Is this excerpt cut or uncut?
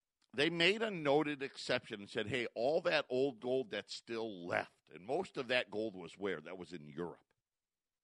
uncut